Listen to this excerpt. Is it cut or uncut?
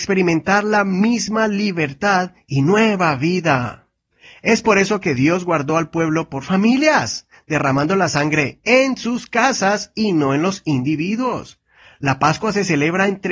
uncut